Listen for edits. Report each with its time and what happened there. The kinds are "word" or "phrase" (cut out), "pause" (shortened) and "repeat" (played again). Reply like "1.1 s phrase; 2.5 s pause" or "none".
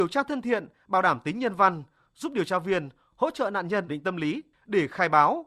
3.9 s word